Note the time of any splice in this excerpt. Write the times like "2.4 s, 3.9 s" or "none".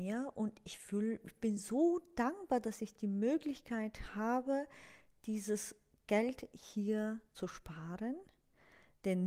none